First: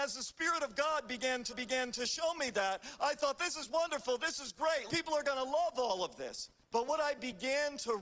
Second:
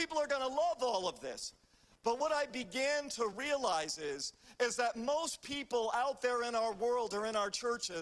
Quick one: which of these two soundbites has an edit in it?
first; 3 cuts; at 1.5 s, 4.9 s, 6.6 s

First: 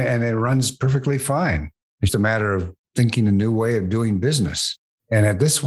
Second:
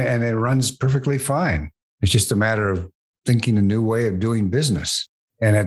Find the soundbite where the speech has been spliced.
first; 2 cuts; at 2.1 s, 2.8 s

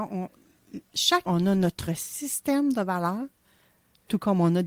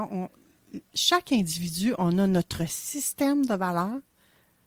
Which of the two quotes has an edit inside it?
first; 1 cut; at 1.2 s

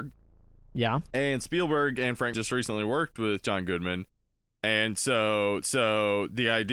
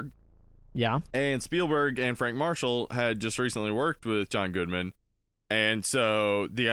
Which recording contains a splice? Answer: first; 2 cuts; at 2.3 s, 5.6 s

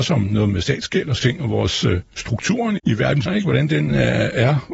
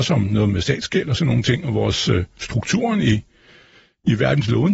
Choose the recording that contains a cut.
first; 3 cuts; at 1.2 s, 2.8 s, 3.3 s

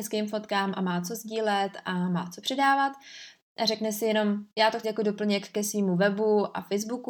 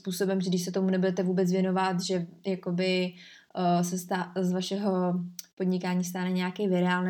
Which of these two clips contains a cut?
first; 1 cut; at 4.8 s

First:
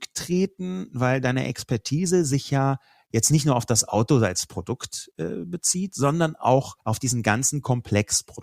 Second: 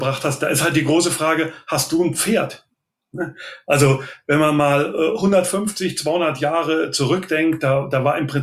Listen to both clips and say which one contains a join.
first; 1 cut; at 6.8 s

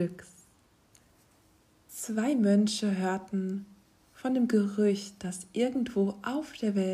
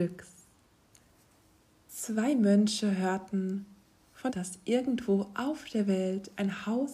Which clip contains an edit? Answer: second; 1 cut; at 4.3 s

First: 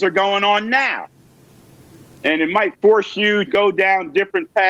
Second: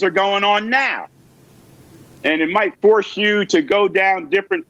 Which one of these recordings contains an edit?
first; 1 cut; at 3.5 s

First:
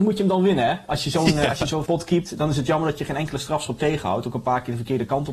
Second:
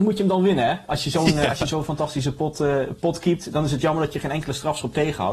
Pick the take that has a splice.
first; 1 cut; at 1.9 s

